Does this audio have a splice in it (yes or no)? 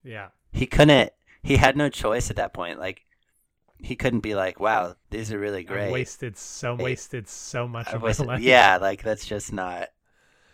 yes